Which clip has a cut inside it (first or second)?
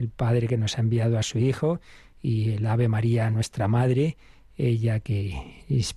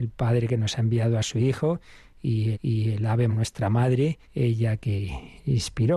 second